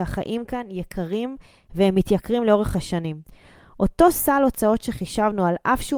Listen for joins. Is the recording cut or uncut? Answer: uncut